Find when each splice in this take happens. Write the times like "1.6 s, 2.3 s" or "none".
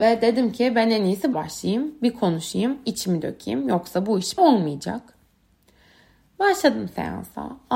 1.3 s, 4.4 s